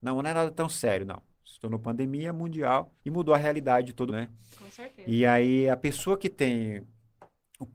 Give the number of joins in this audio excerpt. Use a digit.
2